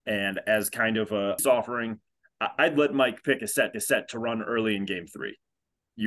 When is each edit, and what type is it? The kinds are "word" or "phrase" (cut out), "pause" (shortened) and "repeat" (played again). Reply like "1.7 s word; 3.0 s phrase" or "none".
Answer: 1.4 s phrase; 3.7 s repeat